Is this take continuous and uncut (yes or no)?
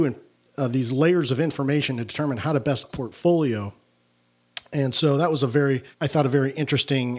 no